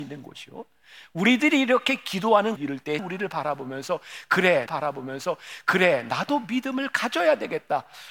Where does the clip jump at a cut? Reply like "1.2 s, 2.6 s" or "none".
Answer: 2.6 s, 3.0 s, 4.7 s